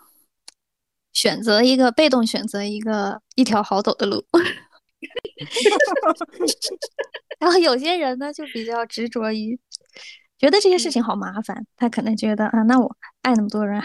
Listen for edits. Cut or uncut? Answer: cut